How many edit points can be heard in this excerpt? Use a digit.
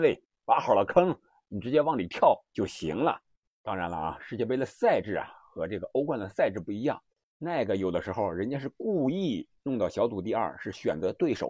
0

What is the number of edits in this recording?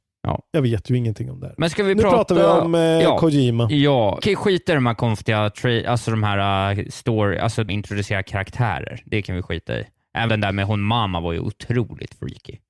3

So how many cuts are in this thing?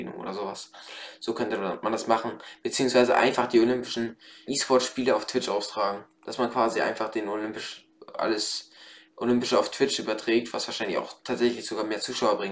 1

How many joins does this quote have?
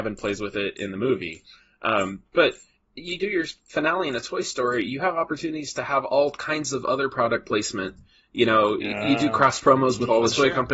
0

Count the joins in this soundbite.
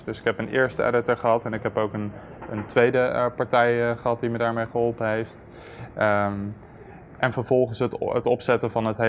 0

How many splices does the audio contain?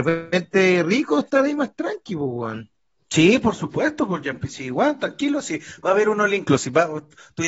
0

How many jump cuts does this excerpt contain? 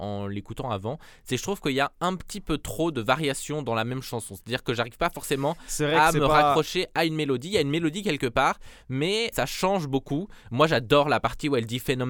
1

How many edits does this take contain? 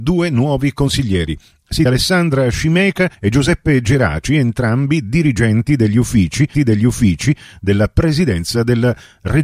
3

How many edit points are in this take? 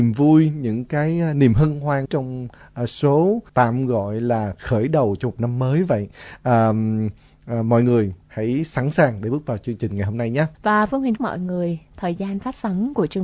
4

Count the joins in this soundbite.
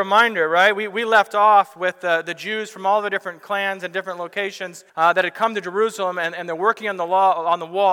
1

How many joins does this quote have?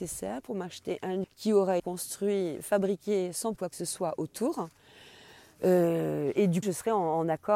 4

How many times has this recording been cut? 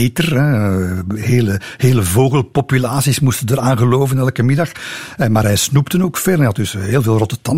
0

